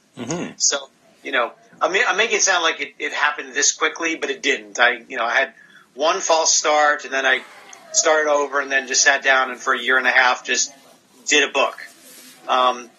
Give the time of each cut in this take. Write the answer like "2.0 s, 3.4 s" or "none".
none

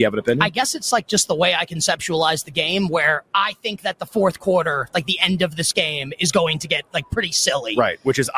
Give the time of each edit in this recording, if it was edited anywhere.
none

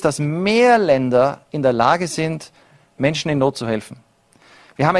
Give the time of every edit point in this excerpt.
none

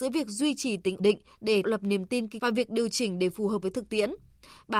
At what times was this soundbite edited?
1.0 s, 1.6 s, 2.4 s, 3.6 s

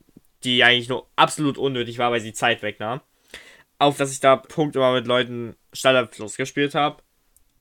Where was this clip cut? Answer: 3.9 s, 4.5 s, 5.6 s

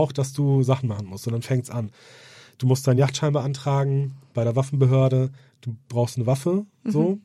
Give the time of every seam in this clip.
none

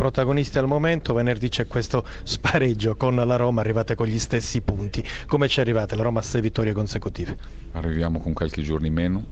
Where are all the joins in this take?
none

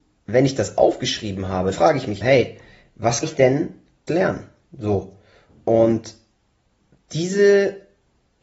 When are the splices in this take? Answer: 1.7 s, 2.2 s, 3.2 s, 4.1 s

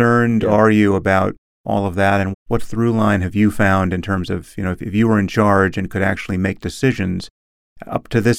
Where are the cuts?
2.3 s

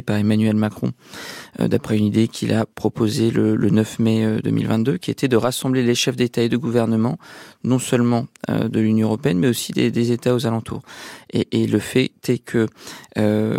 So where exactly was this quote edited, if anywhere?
none

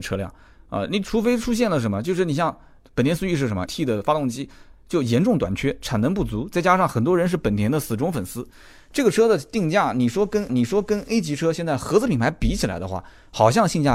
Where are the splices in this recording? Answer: 3.7 s, 10.5 s

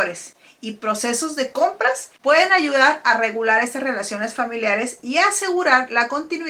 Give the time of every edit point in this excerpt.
2.2 s

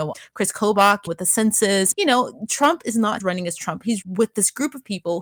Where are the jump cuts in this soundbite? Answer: 1.1 s, 1.9 s, 3.2 s, 4.0 s

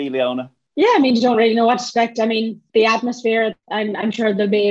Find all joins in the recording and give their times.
none

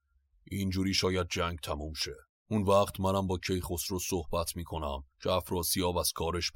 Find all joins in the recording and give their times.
2.4 s, 5.1 s

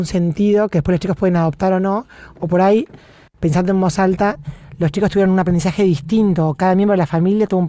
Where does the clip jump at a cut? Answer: none

